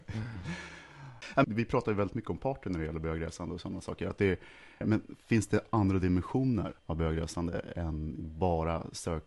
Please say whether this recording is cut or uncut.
cut